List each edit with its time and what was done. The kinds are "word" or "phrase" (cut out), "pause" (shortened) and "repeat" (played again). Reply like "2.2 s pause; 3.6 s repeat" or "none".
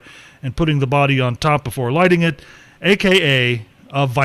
none